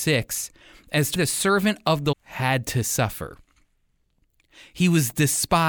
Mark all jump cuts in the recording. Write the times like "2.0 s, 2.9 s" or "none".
1.1 s, 2.1 s